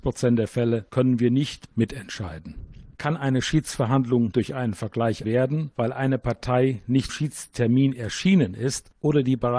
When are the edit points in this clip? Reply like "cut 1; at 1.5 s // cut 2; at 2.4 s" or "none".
cut 1; at 1.7 s // cut 2; at 2.9 s // cut 3; at 4.3 s // cut 4; at 5.2 s // cut 5; at 7.1 s